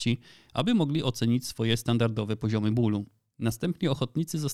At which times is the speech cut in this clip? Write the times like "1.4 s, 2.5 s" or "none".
none

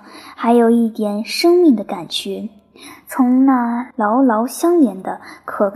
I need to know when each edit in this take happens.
3.9 s

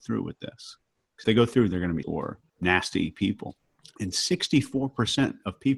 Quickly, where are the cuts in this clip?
1.2 s, 2.0 s, 2.5 s, 3.8 s

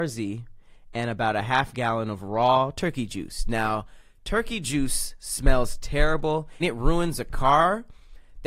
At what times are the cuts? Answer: 6.6 s

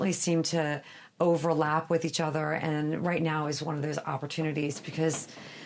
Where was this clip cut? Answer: none

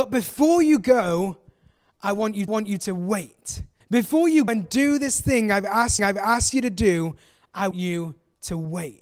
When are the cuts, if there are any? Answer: 2.5 s, 3.8 s, 4.5 s, 6.0 s, 7.7 s

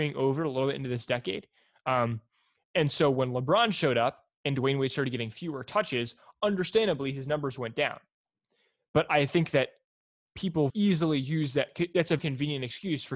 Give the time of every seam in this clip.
10.7 s, 12.2 s

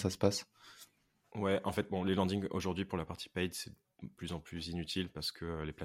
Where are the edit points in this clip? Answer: none

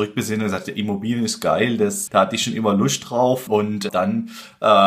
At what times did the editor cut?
2.1 s, 3.5 s, 3.9 s

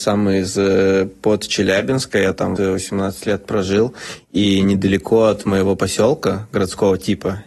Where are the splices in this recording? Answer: 2.6 s

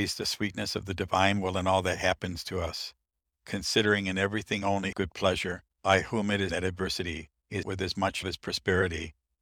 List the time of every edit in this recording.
4.9 s, 5.7 s, 6.5 s, 7.6 s, 8.2 s

